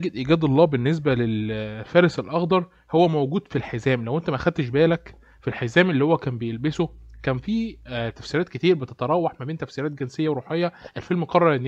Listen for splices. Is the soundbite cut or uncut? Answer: uncut